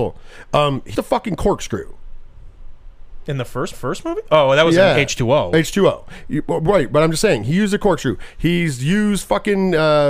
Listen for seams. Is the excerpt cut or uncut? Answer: cut